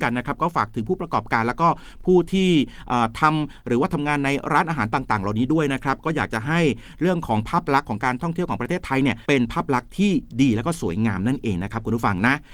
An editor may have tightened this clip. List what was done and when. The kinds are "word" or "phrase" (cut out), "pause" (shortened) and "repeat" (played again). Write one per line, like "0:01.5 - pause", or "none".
0:09.2 - pause